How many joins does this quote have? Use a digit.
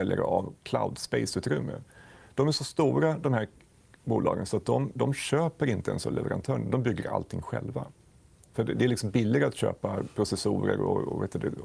0